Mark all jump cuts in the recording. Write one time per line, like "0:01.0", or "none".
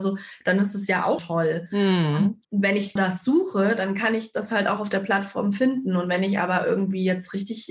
0:01.2
0:02.4
0:03.0